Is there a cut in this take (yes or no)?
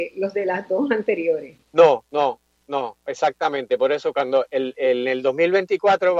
yes